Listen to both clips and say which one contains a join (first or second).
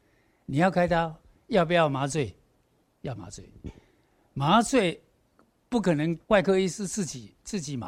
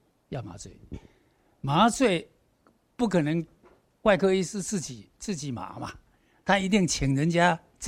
first